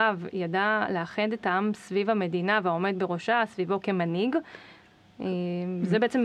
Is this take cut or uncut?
uncut